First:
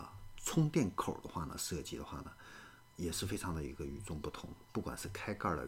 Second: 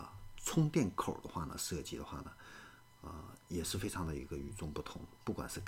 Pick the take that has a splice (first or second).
first